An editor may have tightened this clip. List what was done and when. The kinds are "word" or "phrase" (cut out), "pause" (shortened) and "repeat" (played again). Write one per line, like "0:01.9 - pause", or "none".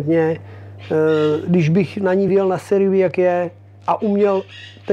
none